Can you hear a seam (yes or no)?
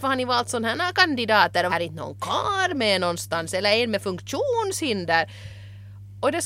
yes